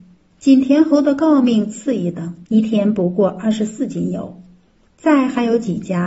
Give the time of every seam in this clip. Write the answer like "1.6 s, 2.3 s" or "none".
2.5 s